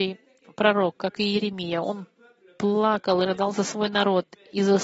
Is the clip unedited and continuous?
yes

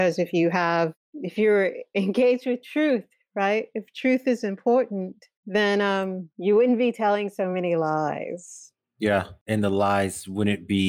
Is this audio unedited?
yes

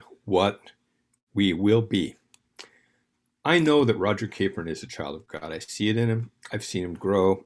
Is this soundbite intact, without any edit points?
yes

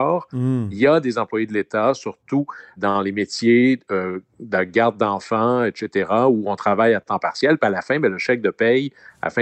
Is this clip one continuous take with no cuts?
no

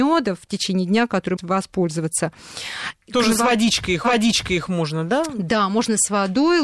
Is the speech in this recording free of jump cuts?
no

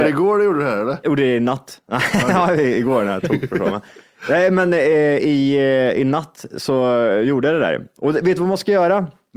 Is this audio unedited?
yes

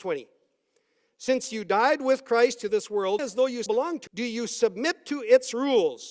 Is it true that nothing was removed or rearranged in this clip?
no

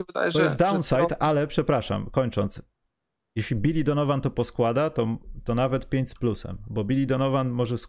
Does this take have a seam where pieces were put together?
no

